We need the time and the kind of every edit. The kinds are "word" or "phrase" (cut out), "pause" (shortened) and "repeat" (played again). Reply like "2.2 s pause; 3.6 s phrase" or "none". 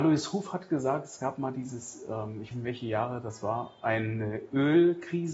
2.5 s phrase